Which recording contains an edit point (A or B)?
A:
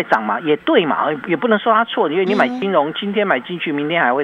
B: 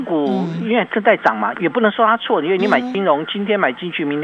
B